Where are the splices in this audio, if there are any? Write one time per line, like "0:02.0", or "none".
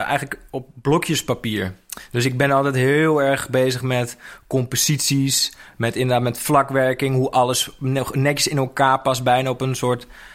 none